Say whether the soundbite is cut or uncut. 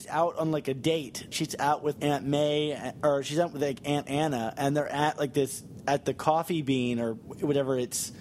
cut